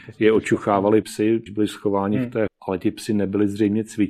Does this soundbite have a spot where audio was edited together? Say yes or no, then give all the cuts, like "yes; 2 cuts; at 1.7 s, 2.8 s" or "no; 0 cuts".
yes; 3 cuts; at 1.0 s, 1.5 s, 2.5 s